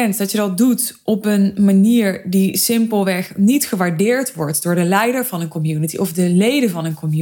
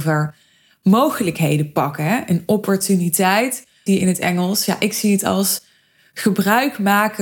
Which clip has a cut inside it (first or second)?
second